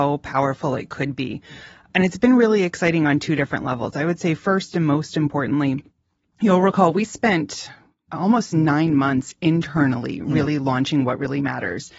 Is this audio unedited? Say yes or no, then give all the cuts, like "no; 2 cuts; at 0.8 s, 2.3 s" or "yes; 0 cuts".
yes; 0 cuts